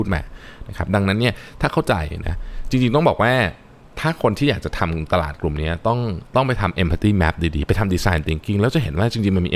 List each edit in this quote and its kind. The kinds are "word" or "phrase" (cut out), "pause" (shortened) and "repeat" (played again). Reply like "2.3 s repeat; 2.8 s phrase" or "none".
none

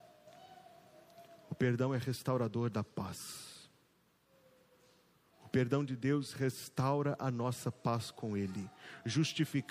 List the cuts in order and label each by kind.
none

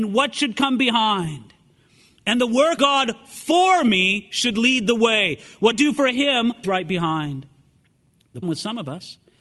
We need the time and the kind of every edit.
2.8 s word; 5.7 s word; 6.6 s word; 8.4 s word

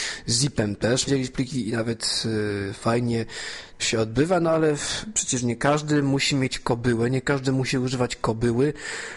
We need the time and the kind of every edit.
1.1 s word; 3.8 s word

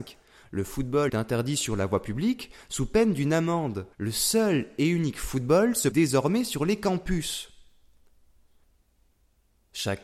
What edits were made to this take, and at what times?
1.1 s word; 3.9 s pause; 5.9 s word

